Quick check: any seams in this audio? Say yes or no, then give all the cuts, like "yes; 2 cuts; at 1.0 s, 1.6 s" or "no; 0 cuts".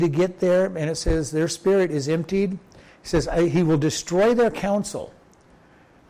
no; 0 cuts